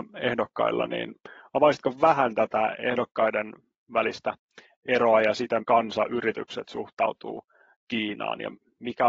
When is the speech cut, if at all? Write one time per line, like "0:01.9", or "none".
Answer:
0:05.6